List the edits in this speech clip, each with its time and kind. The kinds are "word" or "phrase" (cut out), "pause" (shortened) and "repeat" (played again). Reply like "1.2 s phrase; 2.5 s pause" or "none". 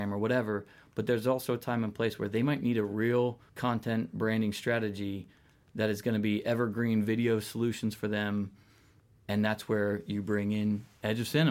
3.5 s pause